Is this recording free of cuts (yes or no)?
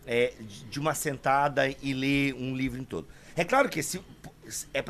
yes